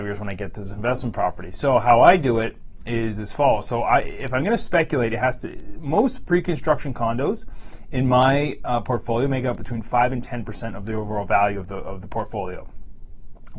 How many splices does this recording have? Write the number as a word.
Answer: zero